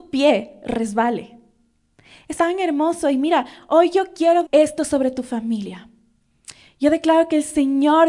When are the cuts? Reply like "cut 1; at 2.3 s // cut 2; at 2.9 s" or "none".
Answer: cut 1; at 2.4 s // cut 2; at 4.4 s

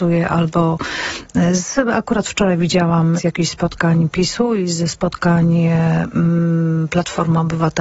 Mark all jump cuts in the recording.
cut 1; at 3.2 s

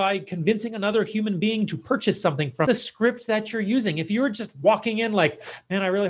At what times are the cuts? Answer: cut 1; at 2.7 s

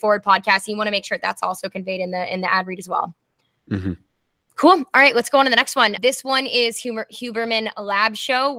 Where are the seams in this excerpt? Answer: none

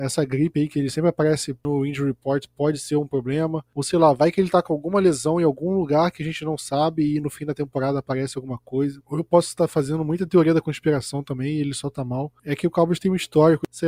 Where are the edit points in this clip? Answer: none

